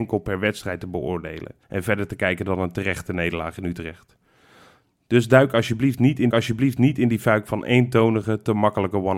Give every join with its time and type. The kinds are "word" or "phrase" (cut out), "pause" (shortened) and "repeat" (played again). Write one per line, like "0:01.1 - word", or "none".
0:01.6 - pause
0:06.3 - repeat